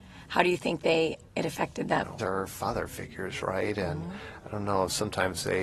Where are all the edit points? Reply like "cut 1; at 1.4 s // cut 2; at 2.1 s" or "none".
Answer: cut 1; at 1.3 s // cut 2; at 2.2 s